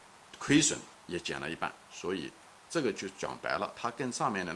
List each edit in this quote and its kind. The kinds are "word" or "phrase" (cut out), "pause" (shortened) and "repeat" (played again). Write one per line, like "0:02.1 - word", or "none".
0:01.0 - pause
0:01.8 - pause